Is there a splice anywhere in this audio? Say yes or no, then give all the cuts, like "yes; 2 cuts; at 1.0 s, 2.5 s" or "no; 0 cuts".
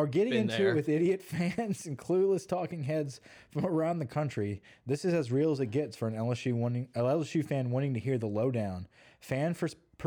no; 0 cuts